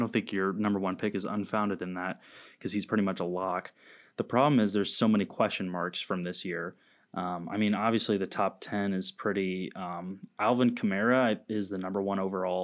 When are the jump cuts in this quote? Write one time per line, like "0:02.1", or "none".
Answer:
none